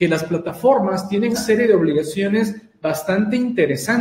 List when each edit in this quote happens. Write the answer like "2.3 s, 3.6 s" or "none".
1.3 s